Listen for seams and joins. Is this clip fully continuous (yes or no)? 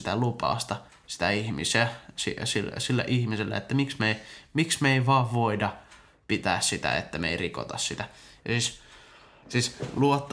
yes